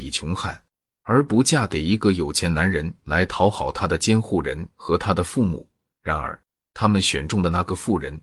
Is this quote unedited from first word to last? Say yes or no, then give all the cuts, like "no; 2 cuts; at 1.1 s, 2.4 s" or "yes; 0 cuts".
yes; 0 cuts